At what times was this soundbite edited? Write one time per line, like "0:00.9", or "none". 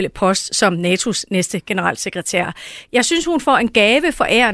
none